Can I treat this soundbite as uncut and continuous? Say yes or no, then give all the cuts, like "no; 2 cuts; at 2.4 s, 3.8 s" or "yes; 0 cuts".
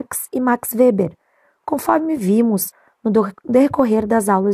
yes; 0 cuts